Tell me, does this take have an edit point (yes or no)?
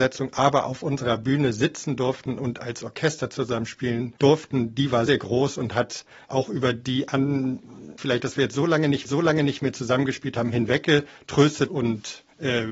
yes